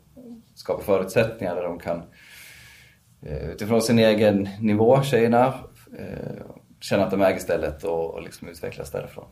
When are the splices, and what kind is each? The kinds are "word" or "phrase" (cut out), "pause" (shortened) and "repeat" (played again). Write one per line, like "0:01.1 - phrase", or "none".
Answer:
none